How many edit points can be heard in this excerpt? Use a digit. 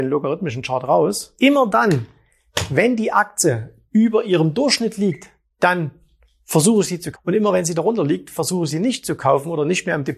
1